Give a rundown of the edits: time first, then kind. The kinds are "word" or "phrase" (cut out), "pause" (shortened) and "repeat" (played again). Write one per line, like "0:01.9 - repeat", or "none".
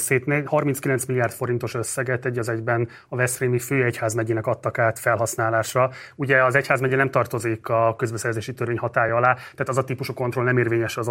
none